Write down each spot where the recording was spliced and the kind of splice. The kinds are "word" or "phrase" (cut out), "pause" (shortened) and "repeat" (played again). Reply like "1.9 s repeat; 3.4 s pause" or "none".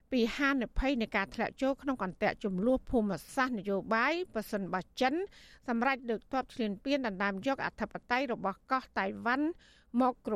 none